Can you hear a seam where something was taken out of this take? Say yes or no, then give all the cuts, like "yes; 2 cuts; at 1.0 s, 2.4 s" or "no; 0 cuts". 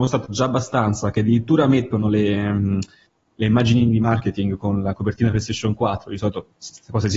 no; 0 cuts